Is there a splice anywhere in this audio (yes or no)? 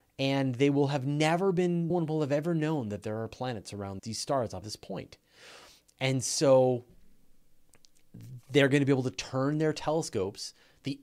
yes